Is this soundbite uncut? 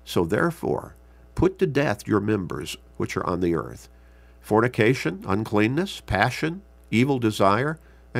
yes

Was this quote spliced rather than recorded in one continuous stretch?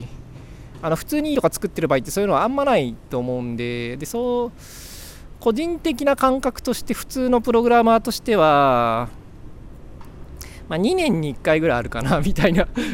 yes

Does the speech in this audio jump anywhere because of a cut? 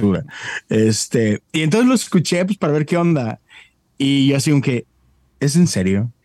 no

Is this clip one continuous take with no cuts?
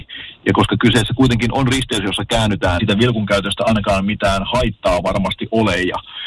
no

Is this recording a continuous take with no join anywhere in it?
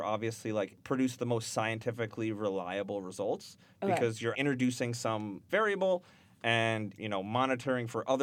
no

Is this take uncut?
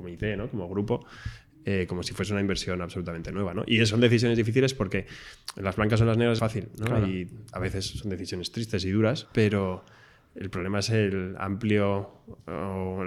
no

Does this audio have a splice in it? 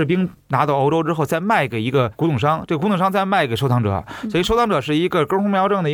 no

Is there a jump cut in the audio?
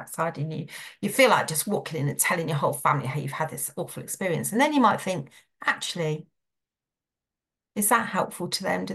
no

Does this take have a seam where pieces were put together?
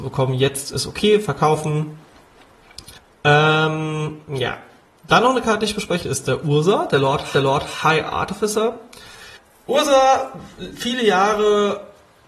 yes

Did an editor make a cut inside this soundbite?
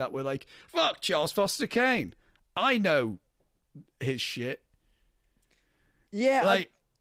no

